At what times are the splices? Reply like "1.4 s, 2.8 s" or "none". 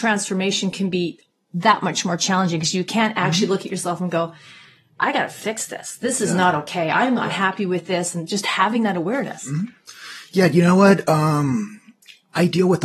none